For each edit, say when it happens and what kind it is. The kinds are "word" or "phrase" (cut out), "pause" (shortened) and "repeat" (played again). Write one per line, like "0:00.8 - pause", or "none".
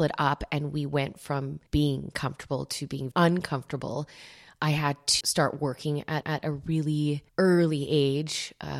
0:01.7 - pause
0:03.1 - word
0:05.2 - word
0:06.2 - repeat
0:07.3 - pause

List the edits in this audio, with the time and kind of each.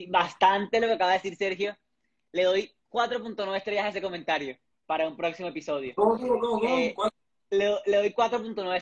none

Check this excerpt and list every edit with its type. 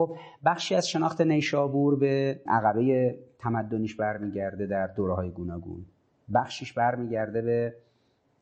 0:02.5 - word

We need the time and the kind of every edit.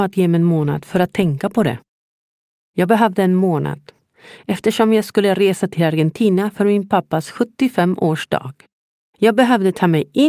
none

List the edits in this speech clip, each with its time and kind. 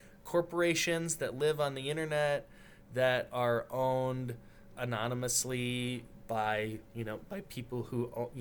0:04.7 - word

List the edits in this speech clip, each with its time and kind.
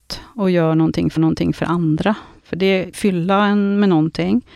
0:01.2 - repeat
0:02.9 - phrase

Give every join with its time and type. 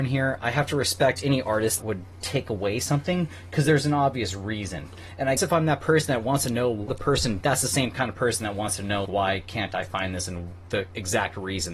0:01.8 - word
0:05.4 - word
0:06.9 - word
0:07.4 - word
0:09.0 - word

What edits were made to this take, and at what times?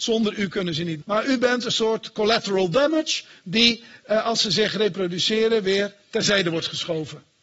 0:01.0 - word

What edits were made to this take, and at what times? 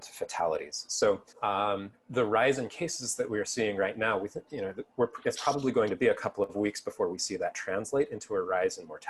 0:01.3 - pause

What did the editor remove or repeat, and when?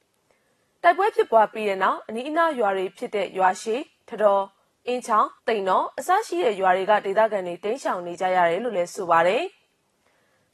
0:05.4 - pause

